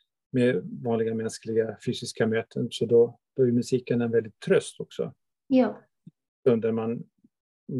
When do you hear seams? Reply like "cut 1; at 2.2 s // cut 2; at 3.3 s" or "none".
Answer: none